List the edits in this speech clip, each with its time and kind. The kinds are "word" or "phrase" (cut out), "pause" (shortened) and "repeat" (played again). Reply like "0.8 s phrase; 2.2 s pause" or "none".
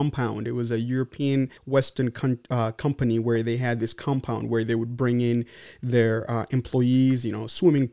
1.6 s pause